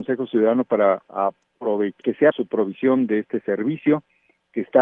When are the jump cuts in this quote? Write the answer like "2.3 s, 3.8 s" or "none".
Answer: 2.0 s, 2.3 s

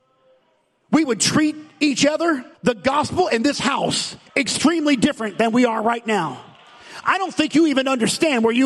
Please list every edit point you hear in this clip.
2.5 s, 4.3 s

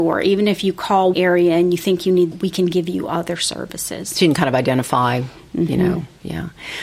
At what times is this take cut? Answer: 1.1 s, 2.3 s

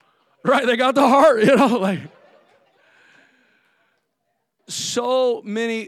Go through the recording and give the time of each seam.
none

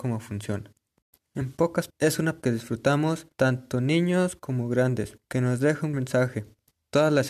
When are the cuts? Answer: 1.9 s, 2.4 s, 3.3 s, 5.2 s, 5.9 s

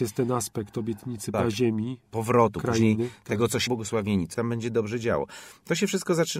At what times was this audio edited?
1.3 s, 3.7 s, 4.3 s

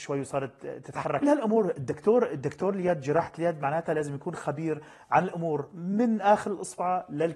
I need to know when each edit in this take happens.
1.2 s

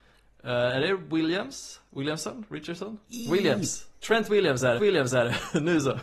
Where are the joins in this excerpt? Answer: 3.0 s, 4.8 s

